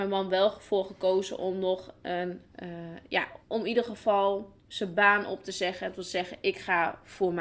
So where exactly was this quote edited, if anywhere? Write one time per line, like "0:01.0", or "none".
0:03.4
0:04.6